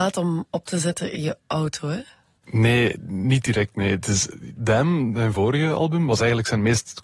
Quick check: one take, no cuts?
yes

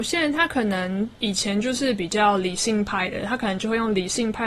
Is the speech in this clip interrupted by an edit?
yes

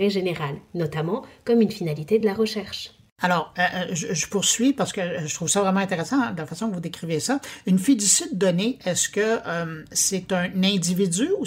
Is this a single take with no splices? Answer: yes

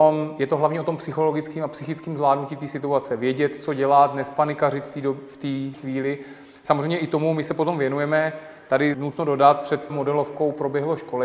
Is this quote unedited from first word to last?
no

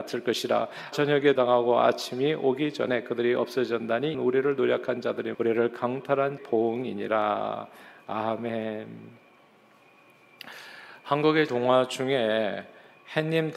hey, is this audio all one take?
no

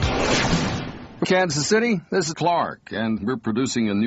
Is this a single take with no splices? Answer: no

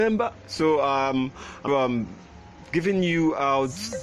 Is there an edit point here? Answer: yes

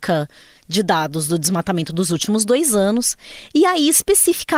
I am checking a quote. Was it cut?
no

